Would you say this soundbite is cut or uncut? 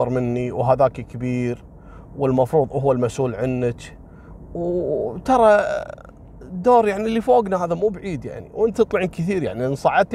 cut